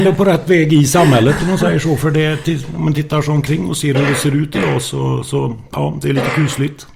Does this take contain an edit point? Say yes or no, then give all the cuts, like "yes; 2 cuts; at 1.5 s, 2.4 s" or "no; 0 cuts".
no; 0 cuts